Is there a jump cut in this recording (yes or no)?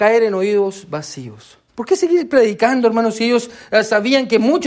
yes